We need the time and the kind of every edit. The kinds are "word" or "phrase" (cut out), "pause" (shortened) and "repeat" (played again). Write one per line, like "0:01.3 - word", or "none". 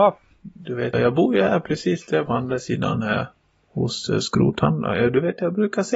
0:00.9 - word
0:02.3 - word